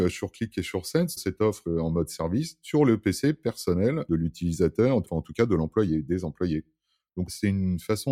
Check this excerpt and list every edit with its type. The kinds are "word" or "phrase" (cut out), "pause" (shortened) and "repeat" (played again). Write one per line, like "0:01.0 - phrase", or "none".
0:01.2 - word
0:01.6 - word